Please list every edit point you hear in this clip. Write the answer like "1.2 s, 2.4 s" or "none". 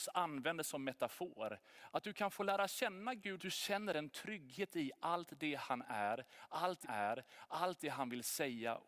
3.4 s, 6.8 s